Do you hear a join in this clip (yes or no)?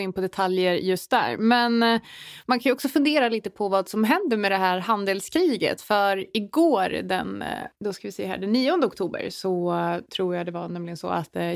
no